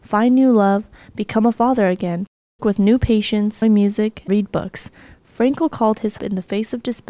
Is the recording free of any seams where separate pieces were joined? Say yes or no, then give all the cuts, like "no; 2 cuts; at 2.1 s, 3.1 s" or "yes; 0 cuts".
no; 4 cuts; at 2.6 s, 3.6 s, 4.3 s, 6.2 s